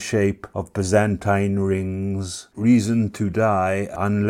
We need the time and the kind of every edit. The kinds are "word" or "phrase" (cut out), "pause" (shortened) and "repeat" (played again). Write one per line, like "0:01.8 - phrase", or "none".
0:02.5 - word